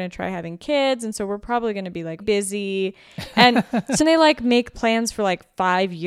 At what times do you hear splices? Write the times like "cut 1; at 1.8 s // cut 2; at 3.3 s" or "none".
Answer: cut 1; at 2.2 s // cut 2; at 4.0 s